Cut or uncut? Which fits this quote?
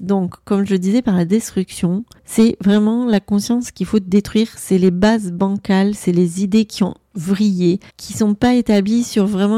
cut